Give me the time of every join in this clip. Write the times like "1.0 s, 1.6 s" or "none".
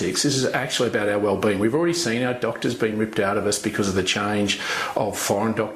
none